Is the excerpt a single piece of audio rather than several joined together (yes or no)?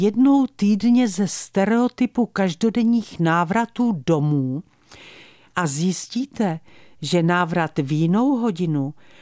yes